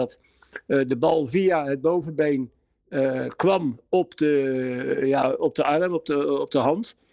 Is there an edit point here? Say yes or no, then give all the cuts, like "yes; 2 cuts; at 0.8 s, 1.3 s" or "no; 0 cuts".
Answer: no; 0 cuts